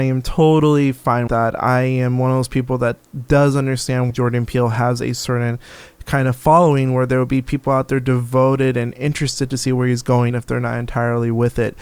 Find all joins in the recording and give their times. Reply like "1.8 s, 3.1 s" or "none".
1.3 s, 4.1 s, 10.3 s